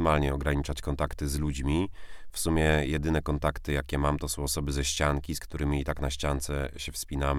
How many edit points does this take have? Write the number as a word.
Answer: zero